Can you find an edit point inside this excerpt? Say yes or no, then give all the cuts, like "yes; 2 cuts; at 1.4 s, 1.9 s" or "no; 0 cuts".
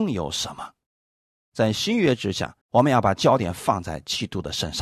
yes; 1 cut; at 2.6 s